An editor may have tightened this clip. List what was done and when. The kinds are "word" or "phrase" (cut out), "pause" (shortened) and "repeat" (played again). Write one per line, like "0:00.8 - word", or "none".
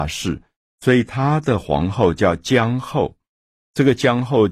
none